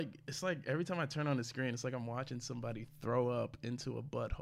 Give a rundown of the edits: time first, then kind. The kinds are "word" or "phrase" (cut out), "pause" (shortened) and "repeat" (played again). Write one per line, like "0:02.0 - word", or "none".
none

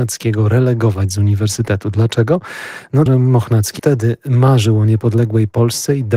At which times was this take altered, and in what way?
0:03.1 - word
0:03.8 - word

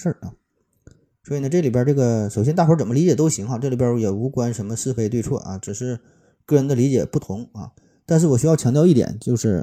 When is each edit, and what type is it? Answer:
none

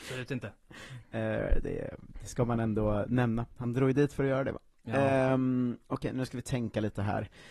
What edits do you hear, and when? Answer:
none

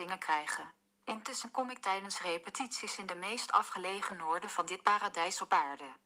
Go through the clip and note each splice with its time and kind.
none

